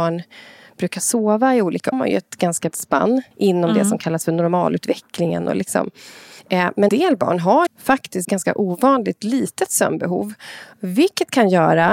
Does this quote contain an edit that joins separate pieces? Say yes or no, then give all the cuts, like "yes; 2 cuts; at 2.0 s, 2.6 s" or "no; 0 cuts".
yes; 6 cuts; at 1.9 s, 2.7 s, 3.3 s, 6.9 s, 7.7 s, 8.2 s